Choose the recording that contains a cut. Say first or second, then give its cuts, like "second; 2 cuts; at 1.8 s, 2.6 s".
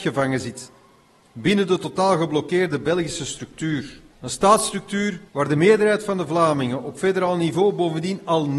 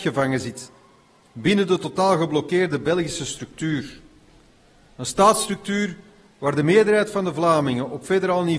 first; 2 cuts; at 4.1 s, 5.3 s